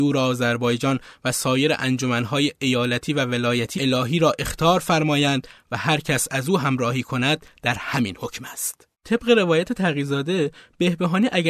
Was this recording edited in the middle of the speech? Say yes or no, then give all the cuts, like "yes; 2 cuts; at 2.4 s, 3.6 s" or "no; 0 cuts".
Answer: yes; 2 cuts; at 3.8 s, 8.9 s